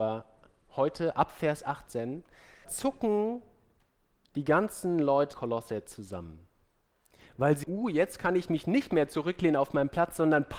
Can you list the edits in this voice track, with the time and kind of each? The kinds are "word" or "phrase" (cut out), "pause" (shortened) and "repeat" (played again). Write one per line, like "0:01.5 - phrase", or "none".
0:02.6 - word
0:05.3 - word
0:07.6 - word